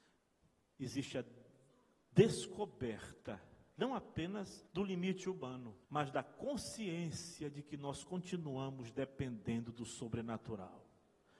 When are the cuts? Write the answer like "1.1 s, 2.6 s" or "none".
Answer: 4.7 s, 5.8 s